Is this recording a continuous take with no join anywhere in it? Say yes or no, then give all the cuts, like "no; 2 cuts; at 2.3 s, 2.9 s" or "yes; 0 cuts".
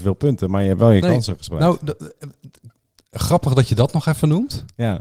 yes; 0 cuts